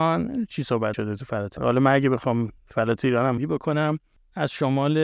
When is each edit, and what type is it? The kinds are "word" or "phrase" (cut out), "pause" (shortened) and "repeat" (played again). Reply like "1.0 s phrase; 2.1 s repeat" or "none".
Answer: 0.9 s word; 1.6 s word; 2.6 s pause; 3.4 s phrase